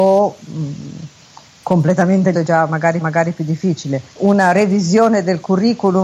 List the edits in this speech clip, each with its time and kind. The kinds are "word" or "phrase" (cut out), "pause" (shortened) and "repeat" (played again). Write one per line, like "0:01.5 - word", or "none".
0:02.3 - word
0:03.0 - repeat
0:04.1 - pause